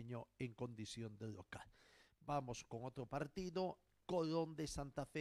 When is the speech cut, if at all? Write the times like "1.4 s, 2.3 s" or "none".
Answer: none

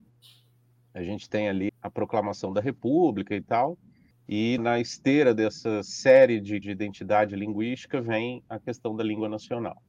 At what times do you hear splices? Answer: 1.7 s, 4.6 s, 6.6 s

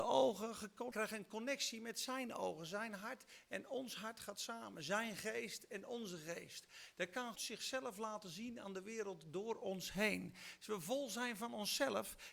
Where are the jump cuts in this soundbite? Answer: 0.9 s, 7.3 s

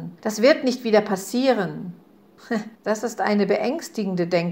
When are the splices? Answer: 2.7 s

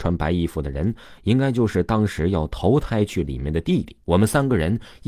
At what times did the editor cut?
4.0 s

